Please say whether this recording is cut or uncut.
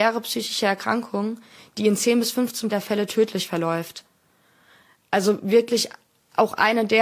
cut